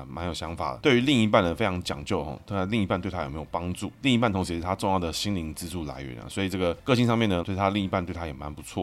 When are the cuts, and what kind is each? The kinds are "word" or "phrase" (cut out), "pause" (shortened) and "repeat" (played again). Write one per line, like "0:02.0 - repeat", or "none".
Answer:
0:07.4 - phrase